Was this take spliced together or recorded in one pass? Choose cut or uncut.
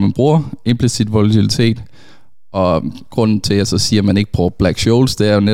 uncut